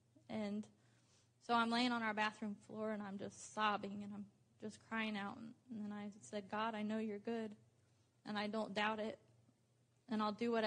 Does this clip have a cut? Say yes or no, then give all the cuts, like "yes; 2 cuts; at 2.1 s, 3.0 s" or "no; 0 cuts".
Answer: no; 0 cuts